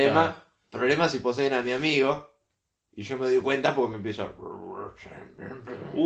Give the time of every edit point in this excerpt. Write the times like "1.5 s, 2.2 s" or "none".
none